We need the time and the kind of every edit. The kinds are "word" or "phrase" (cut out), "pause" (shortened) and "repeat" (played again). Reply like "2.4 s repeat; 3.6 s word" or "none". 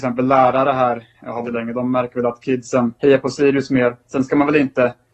1.4 s word; 3.0 s pause; 4.0 s pause